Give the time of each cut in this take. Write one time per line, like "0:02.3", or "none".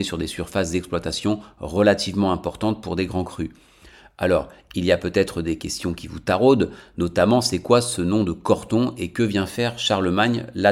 none